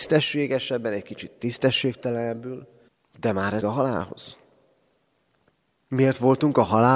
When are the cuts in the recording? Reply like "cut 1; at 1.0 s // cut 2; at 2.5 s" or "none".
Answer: cut 1; at 2.9 s // cut 2; at 3.6 s